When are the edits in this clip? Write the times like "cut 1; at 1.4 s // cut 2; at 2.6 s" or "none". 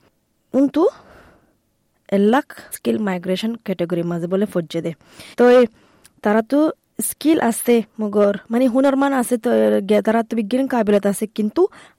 cut 1; at 2.7 s // cut 2; at 5.3 s